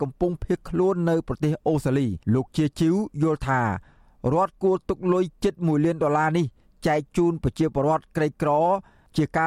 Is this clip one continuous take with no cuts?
no; 1 cut; at 2.2 s

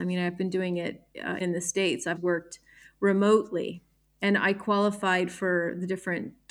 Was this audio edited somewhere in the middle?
yes; 2 cuts; at 1.4 s, 2.2 s

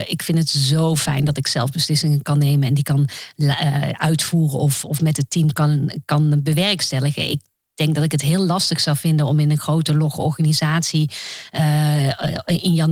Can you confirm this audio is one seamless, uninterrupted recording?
yes; 0 cuts

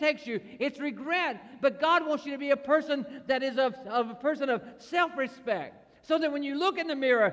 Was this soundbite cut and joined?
no; 0 cuts

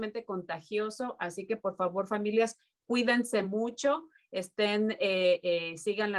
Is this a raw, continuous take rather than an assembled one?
yes; 0 cuts

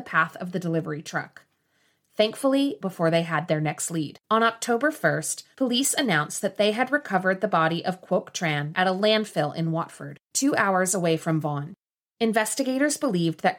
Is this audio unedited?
no; 2 cuts; at 2.8 s, 4.2 s

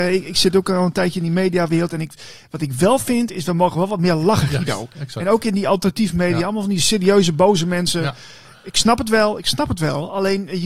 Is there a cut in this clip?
no; 0 cuts

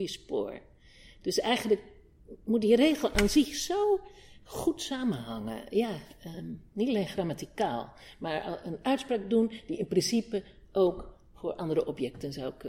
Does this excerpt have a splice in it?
no; 0 cuts

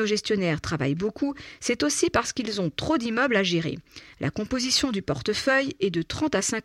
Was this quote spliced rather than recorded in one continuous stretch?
no; 0 cuts

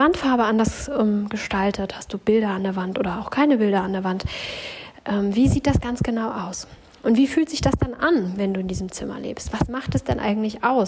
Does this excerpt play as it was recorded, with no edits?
yes; 0 cuts

